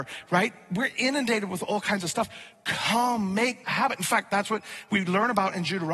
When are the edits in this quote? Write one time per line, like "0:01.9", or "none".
0:03.6